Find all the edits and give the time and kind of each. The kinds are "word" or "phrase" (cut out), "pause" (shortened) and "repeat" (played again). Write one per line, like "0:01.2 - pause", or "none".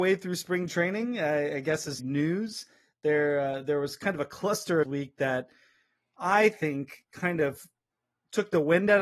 0:02.0 - phrase
0:04.8 - phrase